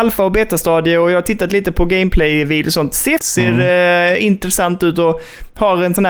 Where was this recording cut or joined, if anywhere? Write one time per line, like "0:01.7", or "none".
0:03.2